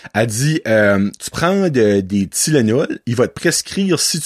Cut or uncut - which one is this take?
cut